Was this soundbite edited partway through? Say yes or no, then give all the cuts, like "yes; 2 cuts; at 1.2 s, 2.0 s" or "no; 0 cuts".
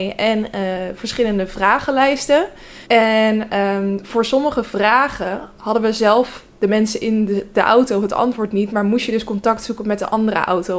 yes; 1 cut; at 2.8 s